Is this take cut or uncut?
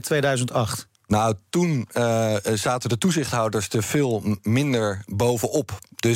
uncut